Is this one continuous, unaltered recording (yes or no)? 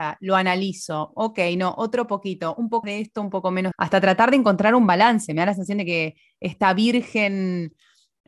no